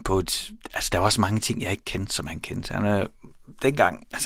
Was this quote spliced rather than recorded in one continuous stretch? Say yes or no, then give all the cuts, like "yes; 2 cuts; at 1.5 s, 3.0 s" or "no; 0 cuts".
no; 0 cuts